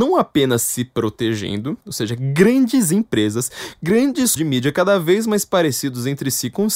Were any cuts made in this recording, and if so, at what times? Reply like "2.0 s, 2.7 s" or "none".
1.8 s, 4.4 s